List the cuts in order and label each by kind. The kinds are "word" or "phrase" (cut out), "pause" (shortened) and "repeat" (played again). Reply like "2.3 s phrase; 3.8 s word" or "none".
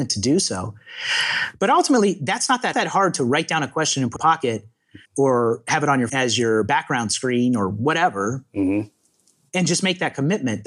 2.7 s phrase; 4.2 s phrase; 5.0 s pause; 6.1 s word